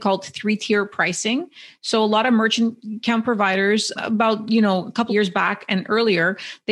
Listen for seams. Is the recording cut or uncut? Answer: cut